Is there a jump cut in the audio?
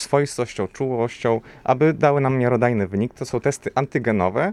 no; 0 cuts

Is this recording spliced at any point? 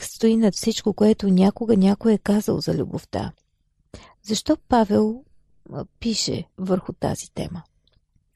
yes; 1 cut; at 6.5 s

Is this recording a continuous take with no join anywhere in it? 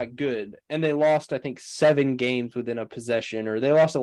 yes; 0 cuts

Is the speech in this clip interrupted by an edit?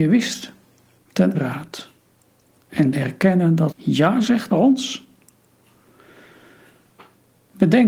yes; 4 cuts; at 1.3 s, 2.9 s, 3.7 s, 4.5 s

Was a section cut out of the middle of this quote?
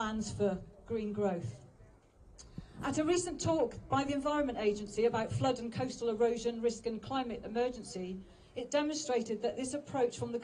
no; 0 cuts

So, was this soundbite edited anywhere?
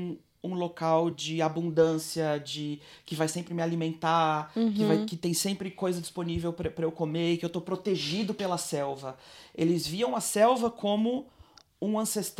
no; 0 cuts

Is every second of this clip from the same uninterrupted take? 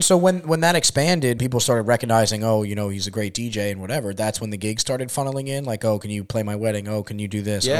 no; 1 cut; at 1.4 s

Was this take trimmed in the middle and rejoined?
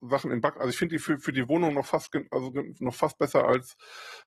no; 0 cuts

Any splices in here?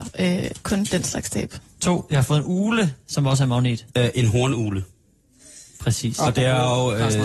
no; 0 cuts

